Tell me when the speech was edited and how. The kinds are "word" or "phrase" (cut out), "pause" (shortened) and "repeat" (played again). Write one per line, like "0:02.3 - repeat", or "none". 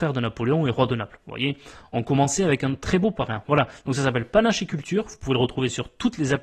none